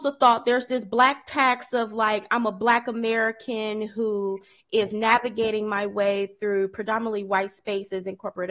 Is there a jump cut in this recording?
no; 0 cuts

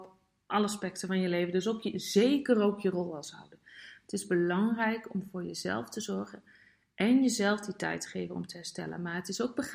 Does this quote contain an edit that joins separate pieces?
no; 0 cuts

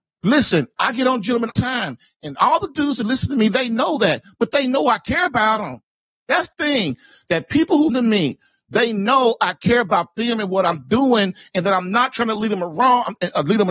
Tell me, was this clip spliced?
yes; 3 cuts; at 1.5 s, 6.5 s, 7.9 s

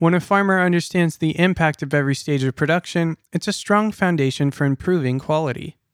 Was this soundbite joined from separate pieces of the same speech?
no; 0 cuts

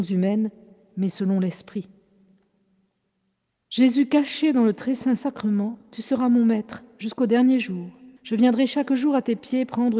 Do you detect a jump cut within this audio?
yes; 1 cut; at 8.2 s

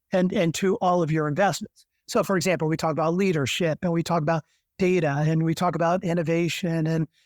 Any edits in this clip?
no; 0 cuts

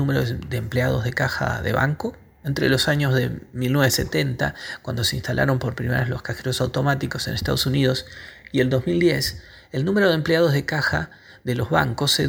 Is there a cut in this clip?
no; 0 cuts

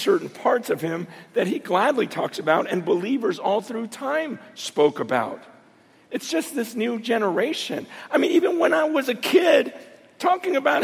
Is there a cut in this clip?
no; 0 cuts

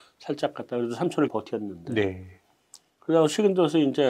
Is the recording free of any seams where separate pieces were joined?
no; 1 cut; at 1.3 s

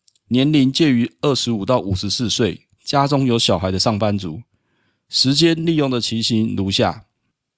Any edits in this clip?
no; 0 cuts

